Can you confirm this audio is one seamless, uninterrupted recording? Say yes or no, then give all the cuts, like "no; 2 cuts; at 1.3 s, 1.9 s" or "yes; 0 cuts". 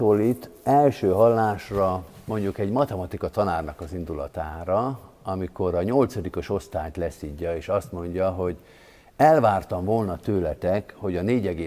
yes; 0 cuts